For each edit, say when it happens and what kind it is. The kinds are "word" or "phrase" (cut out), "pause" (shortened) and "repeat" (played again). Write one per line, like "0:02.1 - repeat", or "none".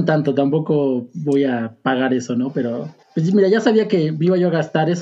0:03.0 - pause